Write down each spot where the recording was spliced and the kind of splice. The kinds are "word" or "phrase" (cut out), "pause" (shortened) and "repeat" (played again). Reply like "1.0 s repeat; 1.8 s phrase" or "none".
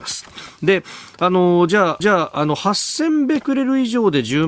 2.0 s repeat